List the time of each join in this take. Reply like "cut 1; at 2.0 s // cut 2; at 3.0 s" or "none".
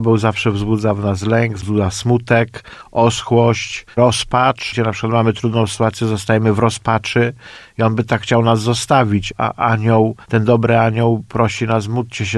cut 1; at 3.9 s // cut 2; at 10.2 s